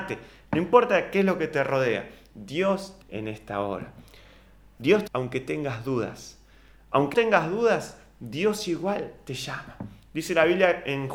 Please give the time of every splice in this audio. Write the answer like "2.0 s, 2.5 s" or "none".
3.0 s, 5.1 s, 7.1 s

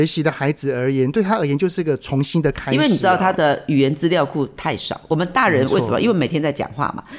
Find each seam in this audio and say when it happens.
none

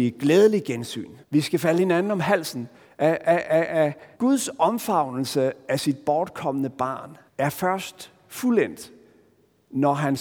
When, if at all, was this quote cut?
1.2 s, 2.7 s, 4.1 s, 7.3 s

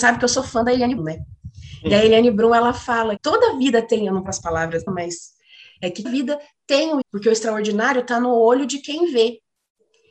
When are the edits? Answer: 1.0 s, 3.2 s, 4.3 s, 4.9 s, 6.0 s, 7.0 s

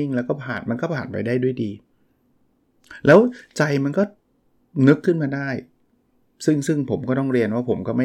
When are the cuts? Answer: none

